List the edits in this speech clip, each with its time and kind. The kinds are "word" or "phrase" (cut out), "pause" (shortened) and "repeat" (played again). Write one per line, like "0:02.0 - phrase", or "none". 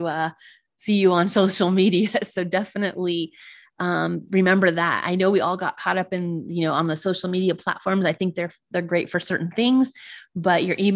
none